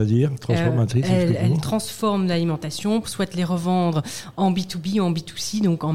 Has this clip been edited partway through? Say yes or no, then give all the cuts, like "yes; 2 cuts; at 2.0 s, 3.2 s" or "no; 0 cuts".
yes; 1 cut; at 3.0 s